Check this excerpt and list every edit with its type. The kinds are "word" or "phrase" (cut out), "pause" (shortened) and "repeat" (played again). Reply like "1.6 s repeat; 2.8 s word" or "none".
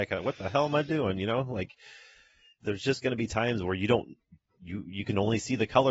none